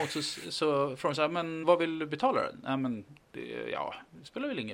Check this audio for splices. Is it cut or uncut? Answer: cut